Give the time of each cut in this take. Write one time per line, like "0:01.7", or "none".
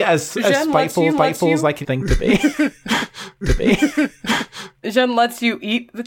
0:01.1
0:01.8
0:03.4
0:04.8